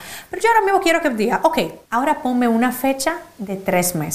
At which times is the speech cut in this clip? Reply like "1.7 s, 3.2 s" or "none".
1.9 s